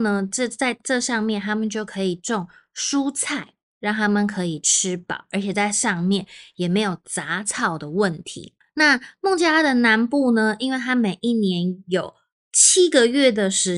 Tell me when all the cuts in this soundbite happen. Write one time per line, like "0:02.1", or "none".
none